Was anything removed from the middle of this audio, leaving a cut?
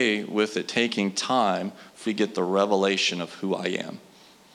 yes; 1 cut; at 2.1 s

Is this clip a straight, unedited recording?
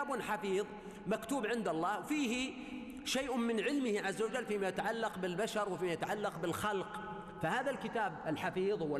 yes; 0 cuts

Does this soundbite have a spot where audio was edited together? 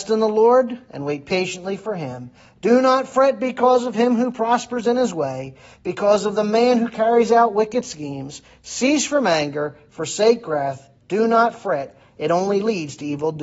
no; 0 cuts

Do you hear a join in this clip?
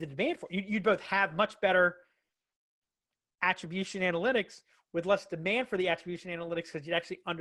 no; 0 cuts

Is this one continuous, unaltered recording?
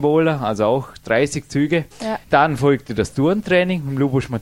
no; 1 cut; at 1.9 s

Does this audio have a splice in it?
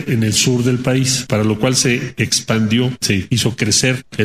no; 0 cuts

